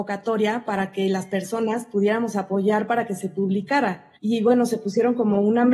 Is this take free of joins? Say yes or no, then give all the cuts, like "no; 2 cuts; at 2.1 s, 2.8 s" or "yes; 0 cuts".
no; 1 cut; at 4.2 s